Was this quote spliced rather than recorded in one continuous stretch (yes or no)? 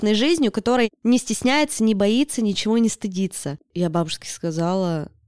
no